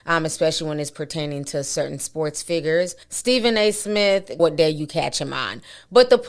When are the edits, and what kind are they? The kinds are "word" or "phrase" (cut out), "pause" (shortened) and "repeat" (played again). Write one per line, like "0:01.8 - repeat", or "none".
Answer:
0:03.0 - pause
0:04.4 - phrase